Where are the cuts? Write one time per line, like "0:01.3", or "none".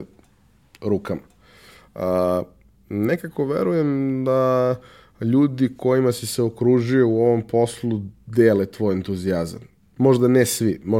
none